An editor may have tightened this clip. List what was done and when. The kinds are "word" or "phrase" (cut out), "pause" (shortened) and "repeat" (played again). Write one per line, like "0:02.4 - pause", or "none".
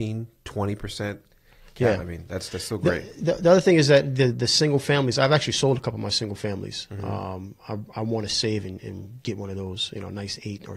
0:09.2 - word